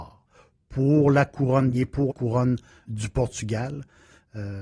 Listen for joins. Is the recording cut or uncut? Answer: cut